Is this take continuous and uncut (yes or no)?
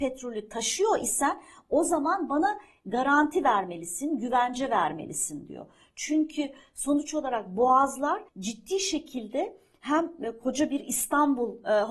no